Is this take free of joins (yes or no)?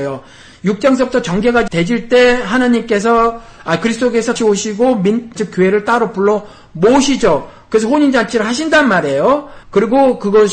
no